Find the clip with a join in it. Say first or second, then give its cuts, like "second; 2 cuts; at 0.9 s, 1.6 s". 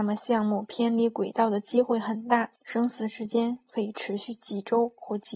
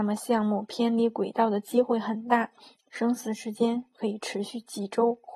first; 1 cut; at 2.6 s